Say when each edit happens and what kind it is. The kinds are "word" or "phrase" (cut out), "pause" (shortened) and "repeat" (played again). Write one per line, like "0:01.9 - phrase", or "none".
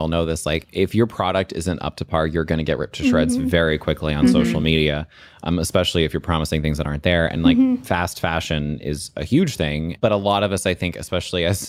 none